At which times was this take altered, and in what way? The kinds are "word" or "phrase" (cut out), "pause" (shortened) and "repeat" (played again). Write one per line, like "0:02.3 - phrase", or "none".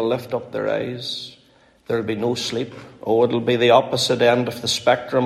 none